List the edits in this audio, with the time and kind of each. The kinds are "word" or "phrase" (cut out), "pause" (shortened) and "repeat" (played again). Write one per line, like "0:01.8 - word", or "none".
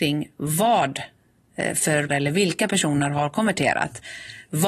0:02.1 - word

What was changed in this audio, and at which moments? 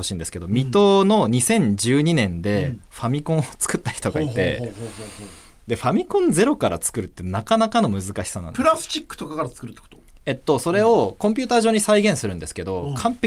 none

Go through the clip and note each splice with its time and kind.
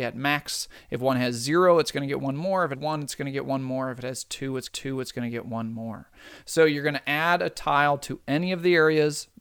0:02.7 - word
0:04.7 - repeat

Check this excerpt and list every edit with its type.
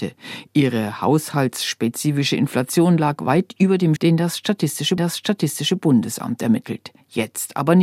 0:04.0 - word
0:05.0 - repeat

